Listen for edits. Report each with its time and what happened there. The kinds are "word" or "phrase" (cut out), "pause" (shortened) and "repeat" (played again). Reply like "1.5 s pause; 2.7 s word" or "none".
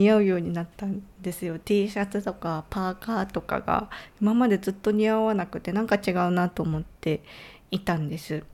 7.0 s pause